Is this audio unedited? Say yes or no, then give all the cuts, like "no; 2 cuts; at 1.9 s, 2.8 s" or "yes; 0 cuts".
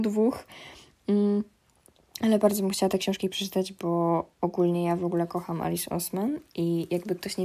yes; 0 cuts